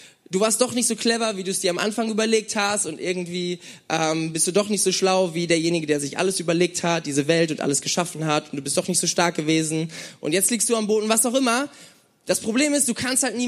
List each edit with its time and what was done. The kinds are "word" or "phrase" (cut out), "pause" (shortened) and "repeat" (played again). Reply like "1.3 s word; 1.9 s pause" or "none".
none